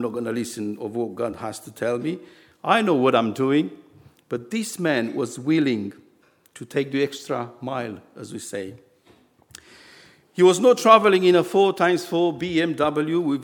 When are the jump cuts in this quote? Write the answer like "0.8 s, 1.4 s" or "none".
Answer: none